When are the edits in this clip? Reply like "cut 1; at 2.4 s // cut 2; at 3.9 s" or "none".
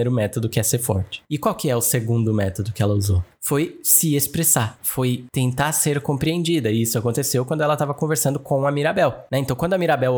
none